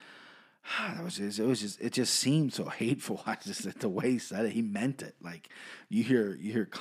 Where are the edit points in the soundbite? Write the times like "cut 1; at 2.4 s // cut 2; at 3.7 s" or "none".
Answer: none